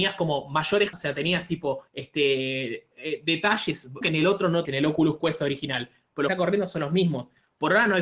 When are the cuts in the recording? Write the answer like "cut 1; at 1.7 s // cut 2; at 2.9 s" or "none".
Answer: cut 1; at 0.9 s // cut 2; at 1.9 s // cut 3; at 4.0 s // cut 4; at 4.7 s // cut 5; at 6.3 s